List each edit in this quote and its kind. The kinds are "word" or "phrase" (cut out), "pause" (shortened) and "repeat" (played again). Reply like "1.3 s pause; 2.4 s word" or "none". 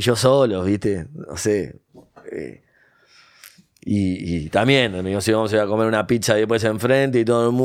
none